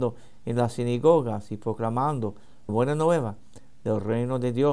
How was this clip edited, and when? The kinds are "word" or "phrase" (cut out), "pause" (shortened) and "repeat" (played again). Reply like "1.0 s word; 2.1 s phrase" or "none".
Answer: 2.7 s word